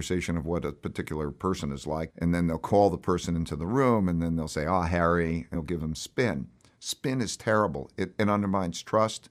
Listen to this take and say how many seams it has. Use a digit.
2